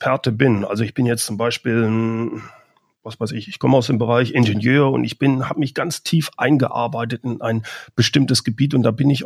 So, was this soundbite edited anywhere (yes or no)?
no